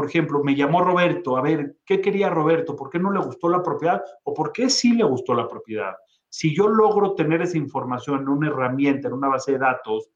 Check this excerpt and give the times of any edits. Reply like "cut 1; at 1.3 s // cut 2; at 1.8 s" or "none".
none